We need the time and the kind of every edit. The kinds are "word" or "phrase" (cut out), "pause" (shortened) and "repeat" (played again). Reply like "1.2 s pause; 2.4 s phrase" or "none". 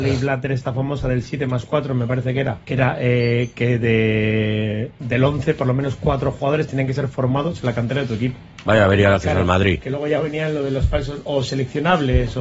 2.6 s pause

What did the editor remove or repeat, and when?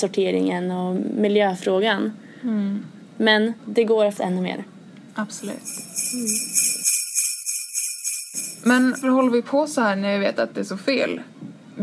3.6 s word; 4.2 s word; 9.0 s word

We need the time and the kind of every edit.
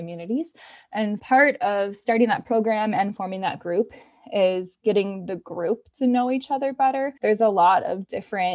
1.2 s word; 7.2 s pause

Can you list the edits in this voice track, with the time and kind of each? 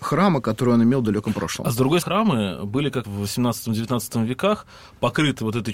2.0 s phrase; 3.0 s word

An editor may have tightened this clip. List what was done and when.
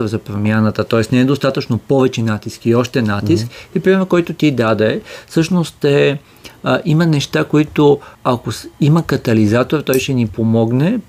8.1 s pause

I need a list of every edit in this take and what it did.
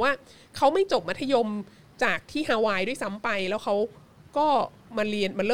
none

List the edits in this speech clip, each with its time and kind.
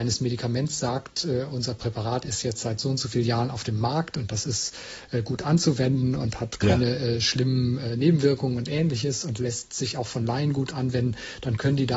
none

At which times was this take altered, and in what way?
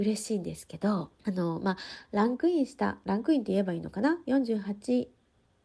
1.2 s pause

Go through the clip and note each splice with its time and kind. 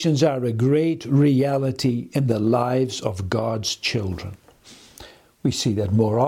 none

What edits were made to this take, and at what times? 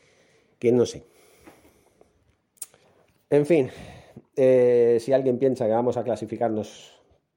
2.8 s pause

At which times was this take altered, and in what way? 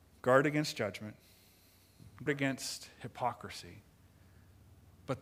2.3 s word

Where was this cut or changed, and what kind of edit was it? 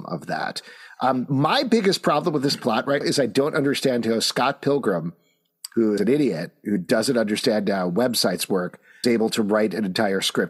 3.0 s word; 6.0 s word; 9.0 s word

